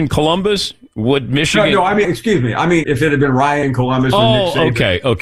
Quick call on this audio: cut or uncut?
cut